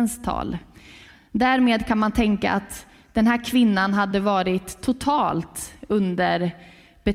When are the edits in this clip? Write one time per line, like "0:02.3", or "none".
none